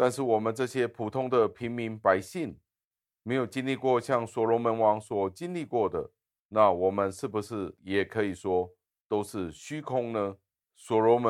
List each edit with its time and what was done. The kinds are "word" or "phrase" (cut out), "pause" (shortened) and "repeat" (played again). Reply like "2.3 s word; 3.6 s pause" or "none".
none